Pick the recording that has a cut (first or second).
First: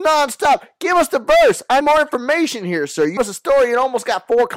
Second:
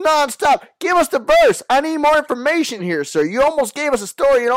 first